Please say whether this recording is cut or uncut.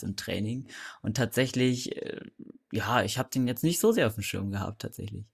uncut